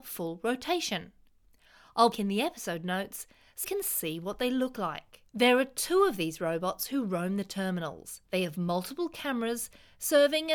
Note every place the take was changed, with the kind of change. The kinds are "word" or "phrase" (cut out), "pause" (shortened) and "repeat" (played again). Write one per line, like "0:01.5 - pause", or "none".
0:02.1 - phrase
0:03.6 - word
0:05.3 - pause
0:08.3 - pause